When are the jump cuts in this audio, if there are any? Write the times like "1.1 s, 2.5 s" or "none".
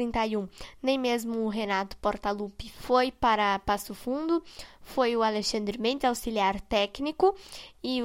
none